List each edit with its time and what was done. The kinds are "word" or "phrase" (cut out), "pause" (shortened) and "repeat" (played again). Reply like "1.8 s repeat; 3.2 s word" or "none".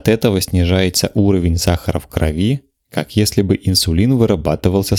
none